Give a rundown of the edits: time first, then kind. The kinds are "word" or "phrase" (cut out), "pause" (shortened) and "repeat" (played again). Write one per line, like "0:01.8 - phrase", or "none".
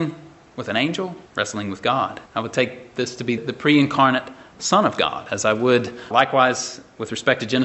0:01.3 - pause
0:02.3 - pause
0:03.4 - word
0:06.1 - word